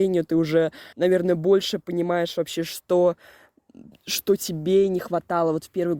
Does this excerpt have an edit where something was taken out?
yes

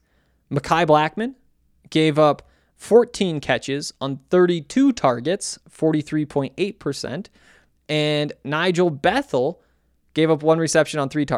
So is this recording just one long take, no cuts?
yes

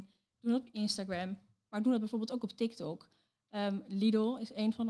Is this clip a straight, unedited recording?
yes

